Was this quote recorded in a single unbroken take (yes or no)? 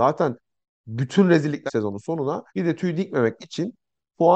no